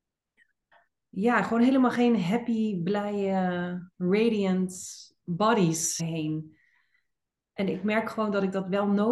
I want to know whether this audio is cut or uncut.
cut